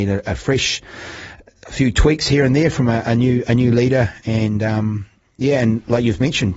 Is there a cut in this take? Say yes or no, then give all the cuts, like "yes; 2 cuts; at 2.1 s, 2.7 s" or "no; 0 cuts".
no; 0 cuts